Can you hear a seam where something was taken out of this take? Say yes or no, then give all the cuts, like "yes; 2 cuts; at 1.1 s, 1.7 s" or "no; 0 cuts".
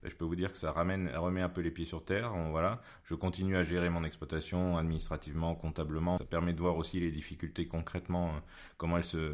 yes; 1 cut; at 6.2 s